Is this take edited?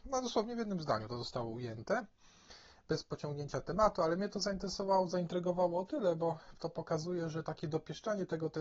no; 0 cuts

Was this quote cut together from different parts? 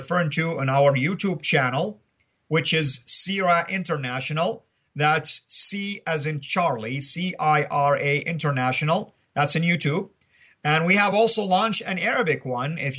no; 0 cuts

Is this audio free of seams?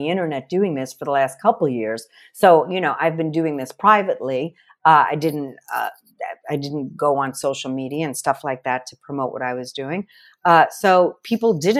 yes; 0 cuts

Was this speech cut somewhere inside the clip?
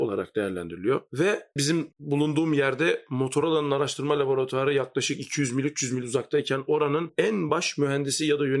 no; 0 cuts

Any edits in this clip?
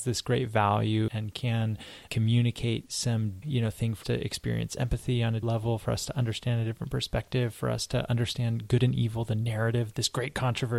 yes; 5 cuts; at 1.1 s, 2.1 s, 3.4 s, 4.0 s, 5.4 s

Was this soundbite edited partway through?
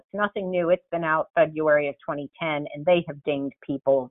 yes; 1 cut; at 1.3 s

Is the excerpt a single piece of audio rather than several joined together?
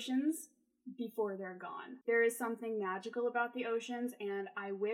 no; 1 cut; at 2.0 s

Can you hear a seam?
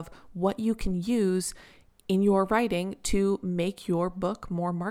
no; 0 cuts

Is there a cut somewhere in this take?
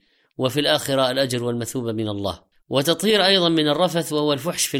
yes; 1 cut; at 2.5 s

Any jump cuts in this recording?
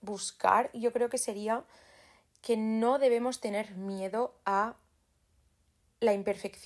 no; 0 cuts

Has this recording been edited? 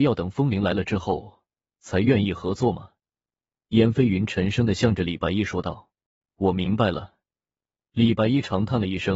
yes; 1 cut; at 6.1 s

